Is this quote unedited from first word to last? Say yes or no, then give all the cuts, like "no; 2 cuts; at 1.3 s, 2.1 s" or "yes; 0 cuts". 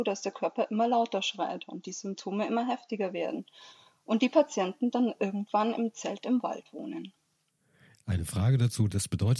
yes; 0 cuts